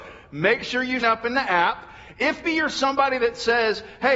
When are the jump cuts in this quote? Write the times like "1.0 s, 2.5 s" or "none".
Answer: 1.0 s, 2.4 s